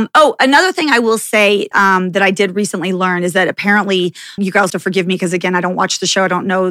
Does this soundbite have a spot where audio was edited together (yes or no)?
yes